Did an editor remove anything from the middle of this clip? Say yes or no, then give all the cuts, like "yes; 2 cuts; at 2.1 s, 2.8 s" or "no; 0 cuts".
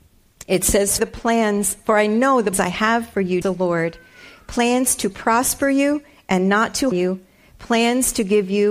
yes; 4 cuts; at 1.0 s, 2.5 s, 3.4 s, 6.9 s